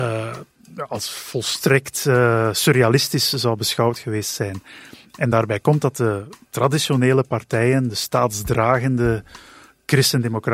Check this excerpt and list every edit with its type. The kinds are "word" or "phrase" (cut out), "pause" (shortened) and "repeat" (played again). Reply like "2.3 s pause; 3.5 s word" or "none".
none